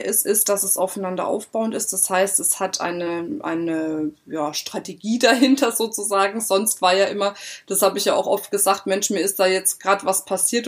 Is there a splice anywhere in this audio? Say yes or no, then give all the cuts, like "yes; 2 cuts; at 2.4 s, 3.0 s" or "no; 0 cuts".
no; 0 cuts